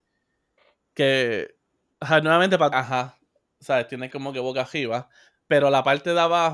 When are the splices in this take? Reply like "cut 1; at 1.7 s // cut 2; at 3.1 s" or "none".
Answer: cut 1; at 2.7 s // cut 2; at 4.1 s